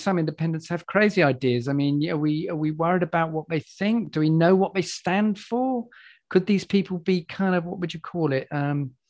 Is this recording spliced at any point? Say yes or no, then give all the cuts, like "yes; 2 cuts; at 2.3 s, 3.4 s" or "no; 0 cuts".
no; 0 cuts